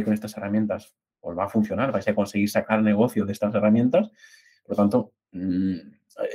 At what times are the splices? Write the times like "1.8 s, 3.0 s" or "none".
none